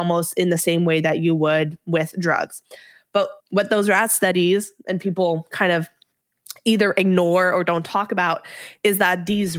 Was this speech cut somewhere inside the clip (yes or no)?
yes